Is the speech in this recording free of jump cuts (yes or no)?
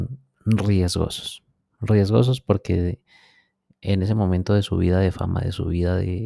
yes